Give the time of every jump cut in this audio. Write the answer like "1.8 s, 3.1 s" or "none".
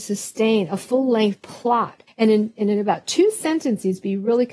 2.1 s